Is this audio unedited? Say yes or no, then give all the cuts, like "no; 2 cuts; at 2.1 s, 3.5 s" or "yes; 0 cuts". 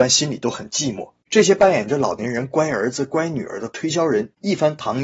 no; 1 cut; at 1.2 s